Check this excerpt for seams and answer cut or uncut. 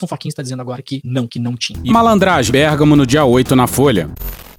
cut